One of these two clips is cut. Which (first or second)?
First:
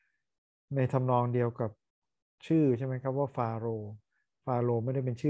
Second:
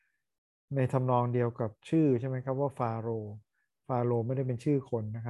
second